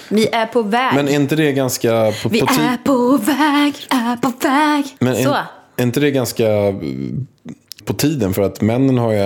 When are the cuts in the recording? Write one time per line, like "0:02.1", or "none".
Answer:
0:03.9
0:05.0
0:07.8